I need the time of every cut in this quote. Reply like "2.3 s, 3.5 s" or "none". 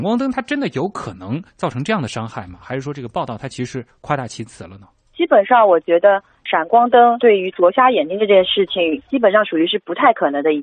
none